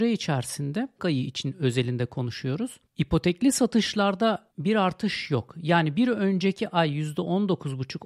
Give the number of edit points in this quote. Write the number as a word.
three